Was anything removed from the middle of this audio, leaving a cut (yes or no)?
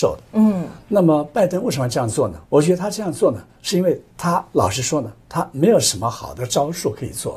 yes